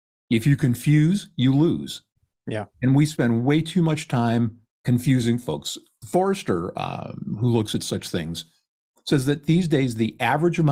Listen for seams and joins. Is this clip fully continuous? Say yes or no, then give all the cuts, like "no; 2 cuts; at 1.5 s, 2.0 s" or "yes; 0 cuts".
yes; 0 cuts